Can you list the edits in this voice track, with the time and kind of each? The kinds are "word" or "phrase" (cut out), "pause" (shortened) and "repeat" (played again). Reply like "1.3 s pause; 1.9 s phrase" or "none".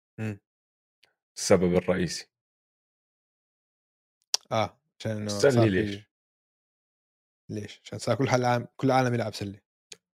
none